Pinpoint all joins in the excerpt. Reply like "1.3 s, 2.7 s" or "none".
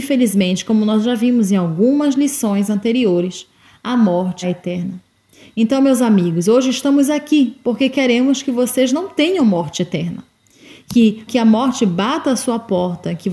4.4 s, 11.3 s